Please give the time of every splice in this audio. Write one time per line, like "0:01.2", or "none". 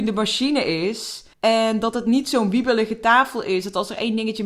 0:01.3

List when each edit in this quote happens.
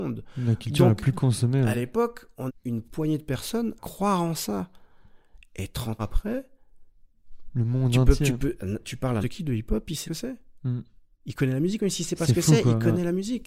0:02.5
0:03.8
0:06.0
0:09.2
0:10.0

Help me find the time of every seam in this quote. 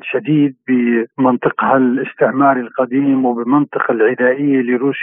none

